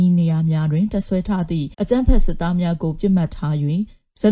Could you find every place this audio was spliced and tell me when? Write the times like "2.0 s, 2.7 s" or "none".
1.7 s